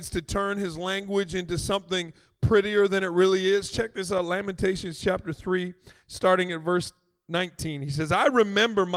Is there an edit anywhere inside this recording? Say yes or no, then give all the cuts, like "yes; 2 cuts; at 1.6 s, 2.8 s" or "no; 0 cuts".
no; 0 cuts